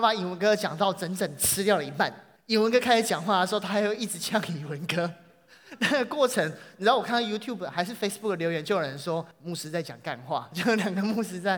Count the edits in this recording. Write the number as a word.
two